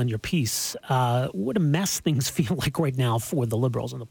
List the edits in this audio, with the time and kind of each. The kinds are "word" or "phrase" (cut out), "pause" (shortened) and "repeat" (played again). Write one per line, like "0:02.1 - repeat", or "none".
none